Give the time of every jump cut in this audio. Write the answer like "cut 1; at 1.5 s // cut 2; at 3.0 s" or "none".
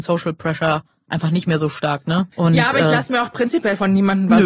cut 1; at 2.3 s